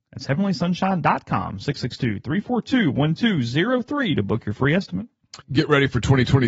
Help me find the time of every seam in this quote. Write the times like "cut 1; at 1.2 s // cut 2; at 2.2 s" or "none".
cut 1; at 5.4 s